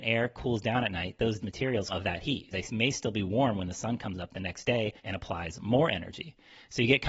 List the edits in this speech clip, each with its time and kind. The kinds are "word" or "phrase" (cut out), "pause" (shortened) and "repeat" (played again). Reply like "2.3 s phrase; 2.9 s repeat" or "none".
1.4 s word; 1.9 s phrase; 2.5 s word; 5.0 s pause